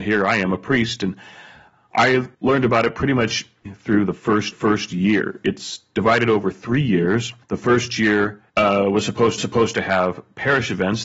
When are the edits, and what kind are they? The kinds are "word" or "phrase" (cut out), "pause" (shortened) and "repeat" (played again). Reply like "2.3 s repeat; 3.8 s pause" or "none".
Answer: 2.3 s pause; 3.7 s word; 4.5 s repeat; 7.4 s pause; 8.5 s pause; 9.4 s repeat